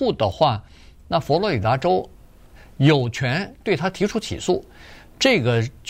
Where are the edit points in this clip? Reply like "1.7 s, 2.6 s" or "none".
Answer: none